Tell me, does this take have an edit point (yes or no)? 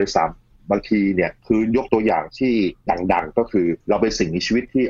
yes